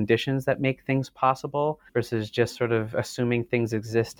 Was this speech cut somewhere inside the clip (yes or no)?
yes